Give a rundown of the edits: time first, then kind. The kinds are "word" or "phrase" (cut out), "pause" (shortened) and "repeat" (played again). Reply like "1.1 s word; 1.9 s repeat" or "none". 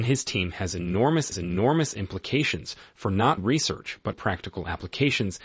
1.3 s repeat; 3.4 s word; 4.1 s word